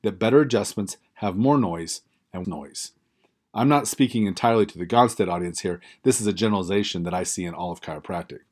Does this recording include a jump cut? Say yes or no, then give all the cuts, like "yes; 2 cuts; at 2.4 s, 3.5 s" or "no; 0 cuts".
yes; 1 cut; at 2.4 s